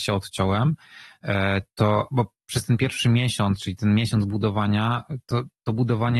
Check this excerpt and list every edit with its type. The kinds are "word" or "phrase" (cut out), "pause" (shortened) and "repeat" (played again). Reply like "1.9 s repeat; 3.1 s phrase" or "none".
none